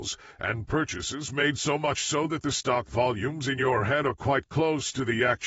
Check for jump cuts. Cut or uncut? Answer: uncut